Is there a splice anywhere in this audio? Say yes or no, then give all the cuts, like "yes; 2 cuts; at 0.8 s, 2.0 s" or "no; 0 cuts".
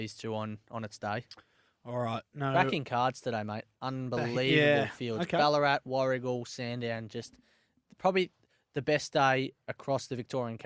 no; 0 cuts